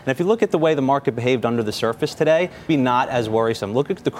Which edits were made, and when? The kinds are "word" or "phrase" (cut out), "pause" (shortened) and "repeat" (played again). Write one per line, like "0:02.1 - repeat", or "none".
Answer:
0:02.7 - word